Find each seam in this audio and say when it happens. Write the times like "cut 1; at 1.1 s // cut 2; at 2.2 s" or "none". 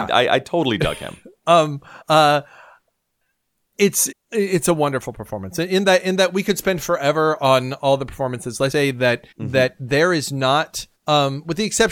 cut 1; at 2.0 s // cut 2; at 4.1 s // cut 3; at 8.7 s // cut 4; at 9.3 s // cut 5; at 10.9 s